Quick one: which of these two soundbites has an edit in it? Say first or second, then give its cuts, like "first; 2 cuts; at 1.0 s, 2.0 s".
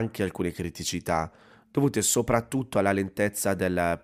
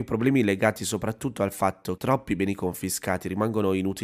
second; 1 cut; at 2.0 s